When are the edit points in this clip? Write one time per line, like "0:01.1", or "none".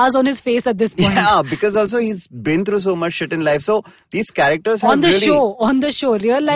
none